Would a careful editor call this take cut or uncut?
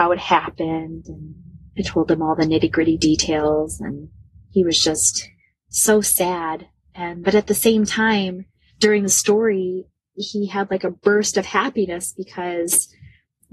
cut